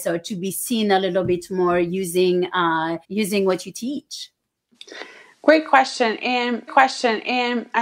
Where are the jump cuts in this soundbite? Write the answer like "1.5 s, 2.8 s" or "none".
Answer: 3.0 s, 6.7 s